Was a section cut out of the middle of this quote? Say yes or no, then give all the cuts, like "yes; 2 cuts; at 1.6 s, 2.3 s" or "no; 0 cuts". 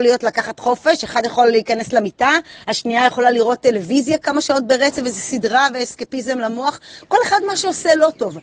no; 0 cuts